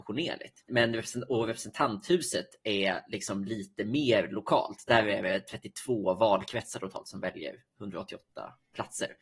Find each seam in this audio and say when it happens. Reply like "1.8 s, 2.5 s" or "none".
none